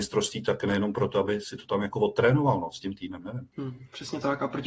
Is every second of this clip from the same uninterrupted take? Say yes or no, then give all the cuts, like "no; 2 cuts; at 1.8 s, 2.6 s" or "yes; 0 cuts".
no; 1 cut; at 3.5 s